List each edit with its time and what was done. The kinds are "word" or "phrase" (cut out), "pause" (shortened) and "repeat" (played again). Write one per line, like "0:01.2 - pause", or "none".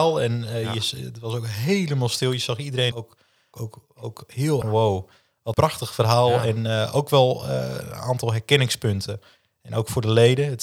0:02.9 - word
0:03.5 - word
0:04.6 - phrase
0:05.5 - word